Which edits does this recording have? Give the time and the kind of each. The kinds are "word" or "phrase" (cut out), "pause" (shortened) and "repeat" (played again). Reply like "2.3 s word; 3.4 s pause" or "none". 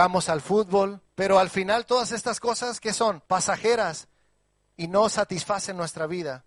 1.1 s pause; 3.3 s pause